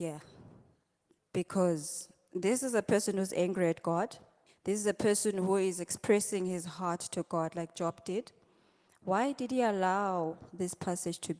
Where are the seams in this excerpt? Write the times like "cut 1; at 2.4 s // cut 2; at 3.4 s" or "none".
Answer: none